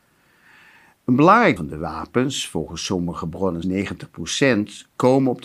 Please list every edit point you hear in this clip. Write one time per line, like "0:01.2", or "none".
0:01.6
0:03.6